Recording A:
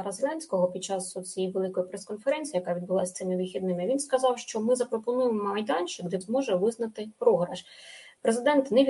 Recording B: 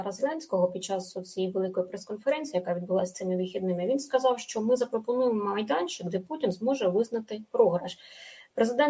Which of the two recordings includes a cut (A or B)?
A